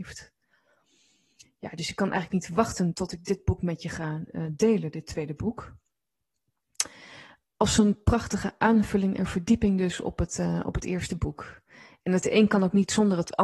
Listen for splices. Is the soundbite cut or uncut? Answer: uncut